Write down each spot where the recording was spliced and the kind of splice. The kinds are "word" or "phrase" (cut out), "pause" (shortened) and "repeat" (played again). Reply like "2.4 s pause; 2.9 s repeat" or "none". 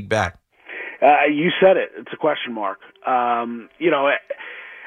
none